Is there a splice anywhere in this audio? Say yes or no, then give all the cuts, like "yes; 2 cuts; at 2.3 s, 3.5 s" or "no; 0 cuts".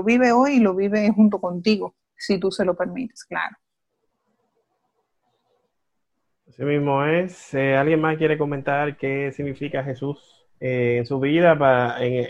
yes; 2 cuts; at 2.0 s, 10.5 s